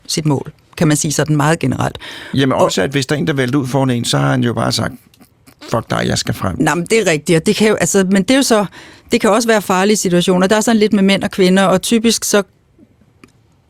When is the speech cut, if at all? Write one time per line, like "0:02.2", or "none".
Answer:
none